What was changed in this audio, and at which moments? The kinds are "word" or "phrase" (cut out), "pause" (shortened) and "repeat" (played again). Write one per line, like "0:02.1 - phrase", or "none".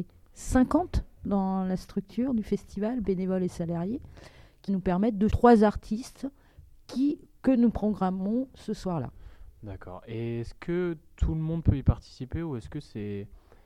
0:04.7 - word
0:05.3 - word